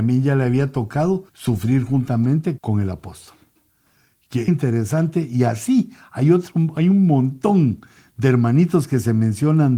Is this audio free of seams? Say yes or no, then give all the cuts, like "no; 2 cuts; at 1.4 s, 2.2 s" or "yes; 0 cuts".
no; 3 cuts; at 1.3 s, 2.6 s, 4.5 s